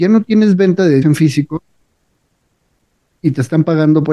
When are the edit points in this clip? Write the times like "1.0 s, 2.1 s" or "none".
1.0 s